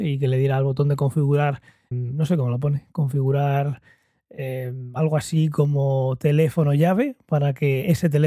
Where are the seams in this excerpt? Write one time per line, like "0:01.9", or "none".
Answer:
0:01.9